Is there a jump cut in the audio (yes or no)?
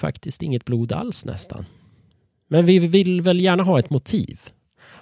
no